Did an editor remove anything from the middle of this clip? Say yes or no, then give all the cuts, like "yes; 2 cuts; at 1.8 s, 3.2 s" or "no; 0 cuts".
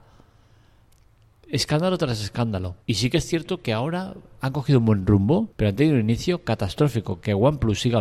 yes; 2 cuts; at 2.8 s, 5.5 s